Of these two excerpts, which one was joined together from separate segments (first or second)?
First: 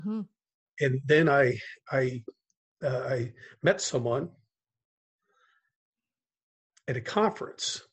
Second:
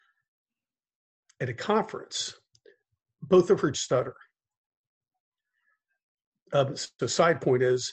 second